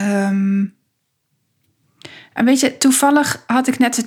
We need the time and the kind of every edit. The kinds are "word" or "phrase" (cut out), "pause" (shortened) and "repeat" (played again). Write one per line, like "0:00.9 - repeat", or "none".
none